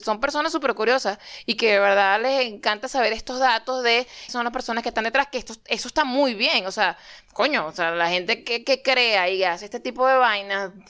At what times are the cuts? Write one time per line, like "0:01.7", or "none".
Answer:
0:04.3